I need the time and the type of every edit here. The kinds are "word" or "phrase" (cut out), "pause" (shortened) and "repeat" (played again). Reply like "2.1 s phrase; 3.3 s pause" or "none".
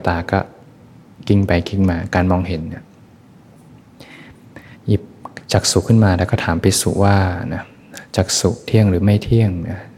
4.7 s pause